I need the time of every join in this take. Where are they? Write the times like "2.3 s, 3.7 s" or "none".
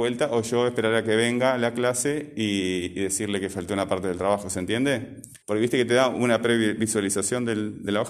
5.4 s